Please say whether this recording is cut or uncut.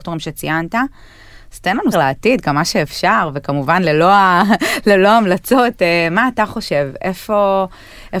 cut